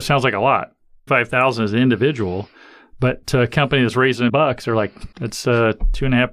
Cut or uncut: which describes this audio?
cut